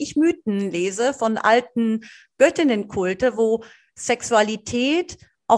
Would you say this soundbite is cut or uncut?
uncut